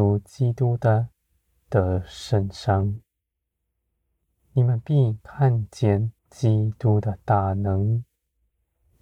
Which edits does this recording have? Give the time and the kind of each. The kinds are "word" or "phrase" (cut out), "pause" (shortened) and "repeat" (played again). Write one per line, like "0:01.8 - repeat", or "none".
0:06.2 - pause